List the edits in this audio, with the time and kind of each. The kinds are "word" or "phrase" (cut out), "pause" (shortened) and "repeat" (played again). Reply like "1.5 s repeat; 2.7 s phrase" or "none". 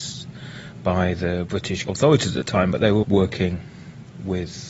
1.8 s word; 3.0 s word